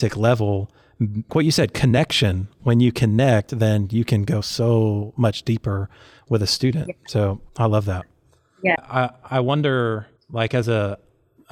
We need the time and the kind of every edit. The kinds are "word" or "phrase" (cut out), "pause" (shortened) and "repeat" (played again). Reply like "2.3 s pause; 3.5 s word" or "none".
1.3 s word; 7.5 s pause; 8.8 s word; 10.2 s pause